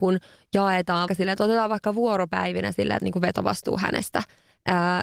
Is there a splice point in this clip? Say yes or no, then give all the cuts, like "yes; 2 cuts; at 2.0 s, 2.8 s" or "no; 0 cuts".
yes; 2 cuts; at 1.1 s, 3.0 s